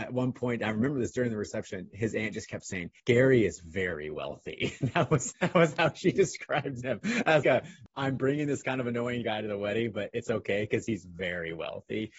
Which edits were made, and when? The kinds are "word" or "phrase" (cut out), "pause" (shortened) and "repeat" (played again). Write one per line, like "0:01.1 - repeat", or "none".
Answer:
0:03.0 - pause
0:05.3 - word
0:07.4 - word